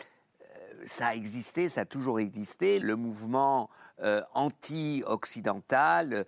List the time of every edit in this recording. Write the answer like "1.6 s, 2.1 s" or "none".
2.8 s